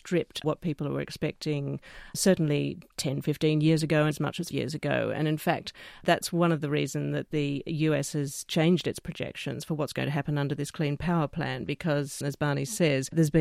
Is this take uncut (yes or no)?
no